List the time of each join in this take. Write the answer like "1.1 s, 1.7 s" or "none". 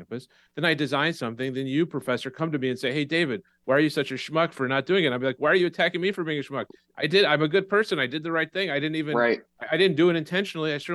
none